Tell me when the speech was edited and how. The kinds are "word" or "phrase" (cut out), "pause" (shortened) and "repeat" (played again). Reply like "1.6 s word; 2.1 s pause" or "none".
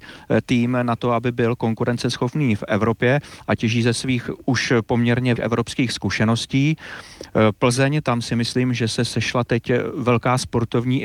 5.4 s word

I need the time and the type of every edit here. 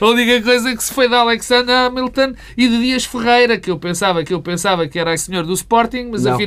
0.9 s word; 4.2 s repeat; 5.2 s word

